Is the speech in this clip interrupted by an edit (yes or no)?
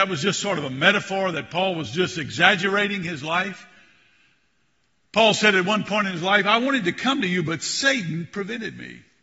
no